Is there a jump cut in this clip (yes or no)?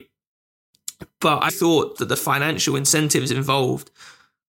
yes